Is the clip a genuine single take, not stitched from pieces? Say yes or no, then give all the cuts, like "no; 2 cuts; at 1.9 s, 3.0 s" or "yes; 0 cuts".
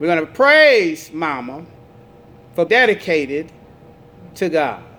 no; 1 cut; at 2.7 s